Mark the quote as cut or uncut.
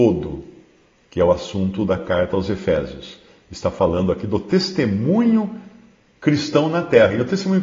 uncut